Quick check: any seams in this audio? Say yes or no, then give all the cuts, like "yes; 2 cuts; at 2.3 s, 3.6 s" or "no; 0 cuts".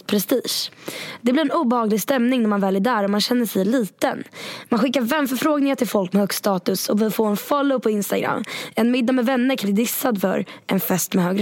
yes; 1 cut; at 9.6 s